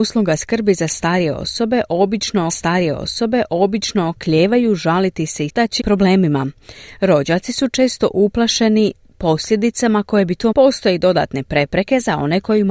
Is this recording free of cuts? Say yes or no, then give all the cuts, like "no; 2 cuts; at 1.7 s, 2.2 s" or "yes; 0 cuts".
no; 4 cuts; at 2.5 s, 5.5 s, 5.8 s, 10.5 s